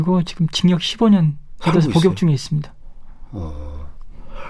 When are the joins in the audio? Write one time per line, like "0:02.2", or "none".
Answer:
none